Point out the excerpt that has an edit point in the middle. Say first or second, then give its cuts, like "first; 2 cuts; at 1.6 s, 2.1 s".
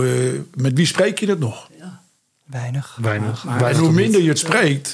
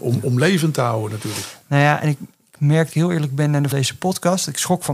second; 2 cuts; at 2.9 s, 3.7 s